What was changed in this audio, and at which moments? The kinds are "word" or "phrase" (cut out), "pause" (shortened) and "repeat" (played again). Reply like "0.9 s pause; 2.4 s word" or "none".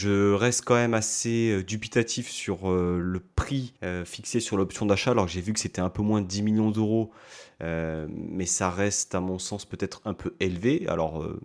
3.8 s pause